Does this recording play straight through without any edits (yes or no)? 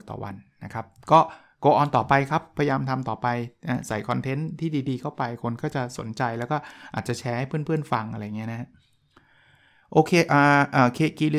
yes